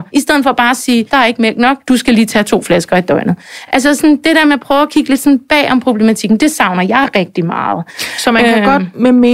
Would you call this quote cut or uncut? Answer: uncut